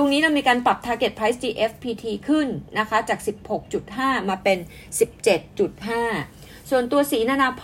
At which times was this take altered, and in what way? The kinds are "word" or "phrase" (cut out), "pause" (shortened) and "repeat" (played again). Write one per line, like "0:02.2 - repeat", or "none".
none

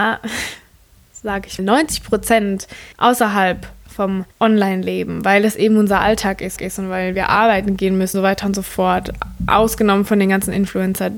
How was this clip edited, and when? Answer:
0:01.6 - word
0:02.9 - pause
0:04.3 - pause
0:06.6 - repeat
0:08.1 - word

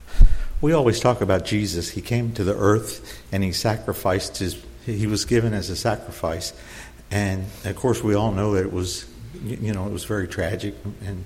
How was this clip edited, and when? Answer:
none

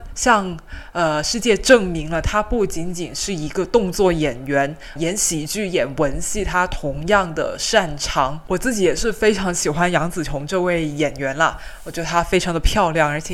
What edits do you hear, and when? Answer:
0:05.0 - word

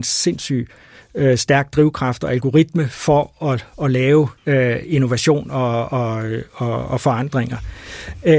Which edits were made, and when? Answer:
0:04.4 - pause

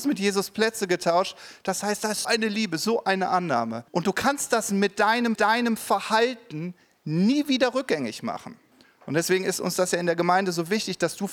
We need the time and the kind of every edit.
0:02.2 - word
0:03.9 - pause
0:05.3 - repeat
0:08.7 - pause

